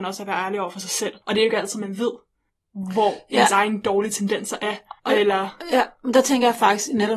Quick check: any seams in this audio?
yes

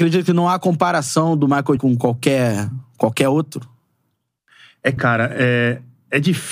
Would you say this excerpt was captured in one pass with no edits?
no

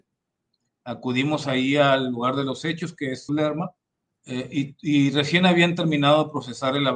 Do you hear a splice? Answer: yes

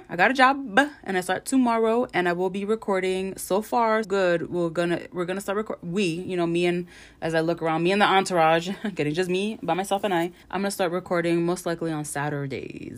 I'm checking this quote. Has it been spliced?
yes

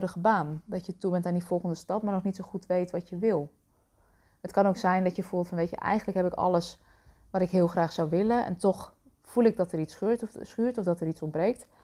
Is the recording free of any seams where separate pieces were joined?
yes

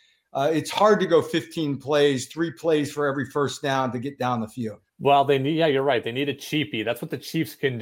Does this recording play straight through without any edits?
no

